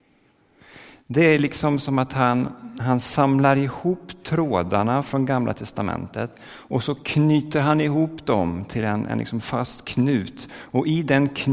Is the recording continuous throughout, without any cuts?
yes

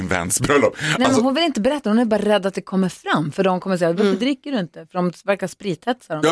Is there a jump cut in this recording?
no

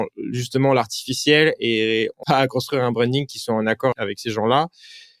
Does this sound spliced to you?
yes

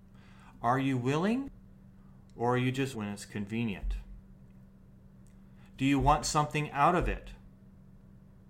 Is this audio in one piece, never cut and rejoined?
no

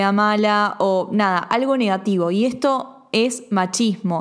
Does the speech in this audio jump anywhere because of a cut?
no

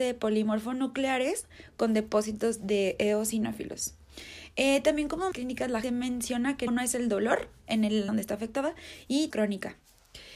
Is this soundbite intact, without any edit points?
no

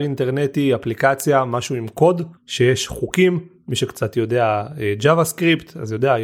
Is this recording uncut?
no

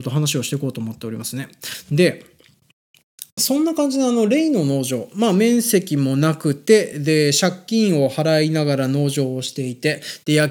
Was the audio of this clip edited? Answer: no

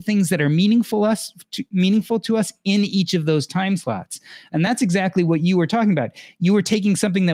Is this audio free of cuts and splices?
yes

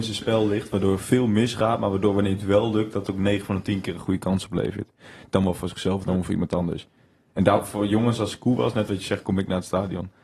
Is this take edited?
no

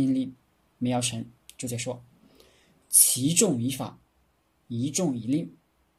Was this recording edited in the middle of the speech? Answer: no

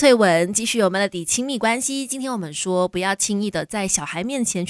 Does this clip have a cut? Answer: no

